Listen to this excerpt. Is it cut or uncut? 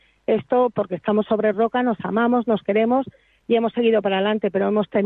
uncut